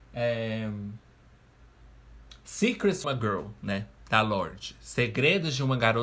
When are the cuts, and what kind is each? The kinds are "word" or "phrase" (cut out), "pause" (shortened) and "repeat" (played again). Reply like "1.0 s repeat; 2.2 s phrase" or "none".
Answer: 3.0 s word